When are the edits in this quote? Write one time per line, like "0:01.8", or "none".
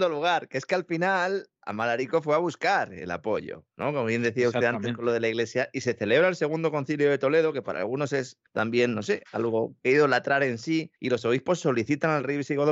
0:08.5
0:11.0